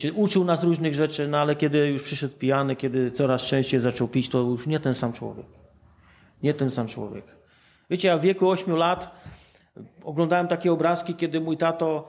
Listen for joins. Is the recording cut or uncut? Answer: uncut